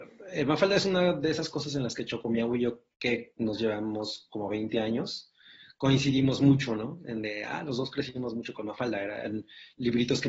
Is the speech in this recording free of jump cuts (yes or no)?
yes